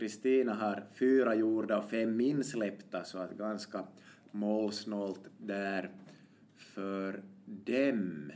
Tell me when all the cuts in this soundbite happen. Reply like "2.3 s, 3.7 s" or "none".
none